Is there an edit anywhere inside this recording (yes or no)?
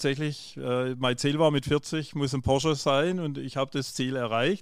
no